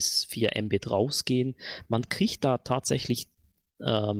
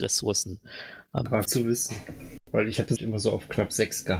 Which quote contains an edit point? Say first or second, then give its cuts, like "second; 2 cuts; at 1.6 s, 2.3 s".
second; 3 cuts; at 1.4 s, 2.4 s, 3.0 s